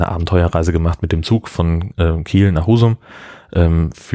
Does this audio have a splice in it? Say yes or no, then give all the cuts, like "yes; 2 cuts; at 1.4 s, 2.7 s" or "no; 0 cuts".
no; 0 cuts